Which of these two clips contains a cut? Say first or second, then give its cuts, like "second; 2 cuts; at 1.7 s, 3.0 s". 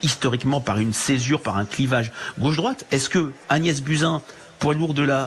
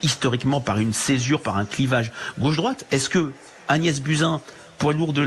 first; 1 cut; at 3.4 s